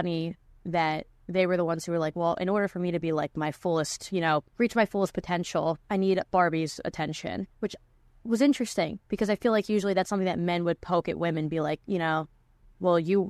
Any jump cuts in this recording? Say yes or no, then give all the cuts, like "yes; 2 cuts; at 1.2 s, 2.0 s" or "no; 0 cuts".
yes; 3 cuts; at 4.5 s, 5.8 s, 7.5 s